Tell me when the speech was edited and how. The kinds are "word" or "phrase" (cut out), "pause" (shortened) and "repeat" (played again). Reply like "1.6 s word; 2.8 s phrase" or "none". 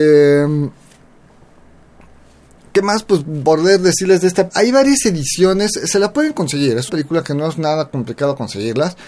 4.5 s word; 6.9 s word